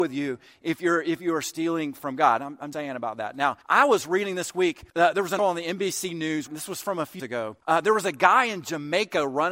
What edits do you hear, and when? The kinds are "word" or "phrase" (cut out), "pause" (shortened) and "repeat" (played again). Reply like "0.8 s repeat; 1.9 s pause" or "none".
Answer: 2.7 s word; 3.6 s pause; 4.9 s pause; 5.4 s word; 6.5 s word; 7.2 s word; 7.6 s pause